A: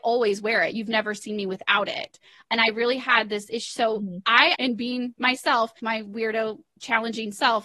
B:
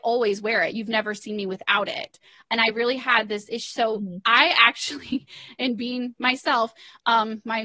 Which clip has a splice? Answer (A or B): A